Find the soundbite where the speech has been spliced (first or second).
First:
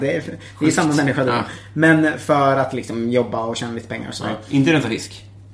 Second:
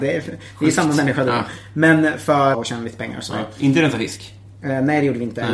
second